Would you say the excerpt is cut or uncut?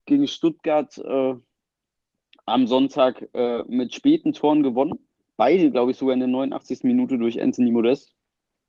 uncut